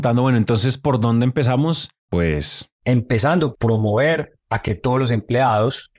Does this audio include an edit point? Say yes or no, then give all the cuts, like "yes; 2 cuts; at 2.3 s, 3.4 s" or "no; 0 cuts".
yes; 2 cuts; at 2.0 s, 3.5 s